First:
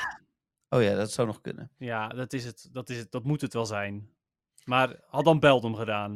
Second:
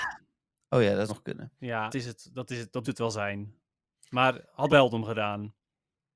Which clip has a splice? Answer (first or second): second